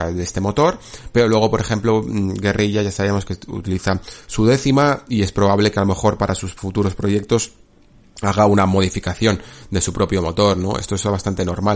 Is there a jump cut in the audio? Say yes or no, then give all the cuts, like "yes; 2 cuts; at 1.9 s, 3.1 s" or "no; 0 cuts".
no; 0 cuts